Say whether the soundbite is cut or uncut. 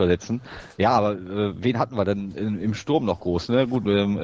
uncut